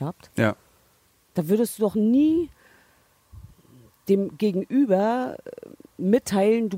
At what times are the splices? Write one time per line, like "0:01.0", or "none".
none